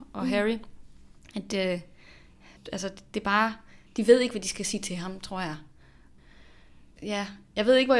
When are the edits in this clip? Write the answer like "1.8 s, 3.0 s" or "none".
3.9 s